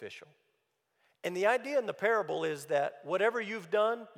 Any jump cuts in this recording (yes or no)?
no